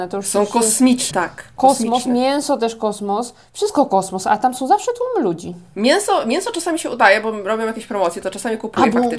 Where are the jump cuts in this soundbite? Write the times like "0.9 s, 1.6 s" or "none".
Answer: 1.1 s